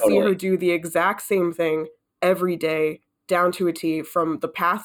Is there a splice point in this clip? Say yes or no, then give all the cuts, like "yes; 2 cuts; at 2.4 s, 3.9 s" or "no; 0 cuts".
no; 0 cuts